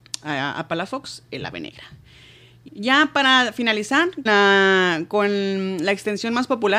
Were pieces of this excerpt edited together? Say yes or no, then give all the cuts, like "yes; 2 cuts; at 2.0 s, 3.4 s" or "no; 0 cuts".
yes; 2 cuts; at 2.7 s, 4.3 s